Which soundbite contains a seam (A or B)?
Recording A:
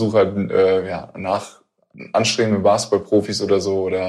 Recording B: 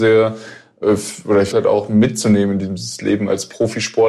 B